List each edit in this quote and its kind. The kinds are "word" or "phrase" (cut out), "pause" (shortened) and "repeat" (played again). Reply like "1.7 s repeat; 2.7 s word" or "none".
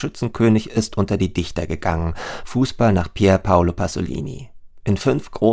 none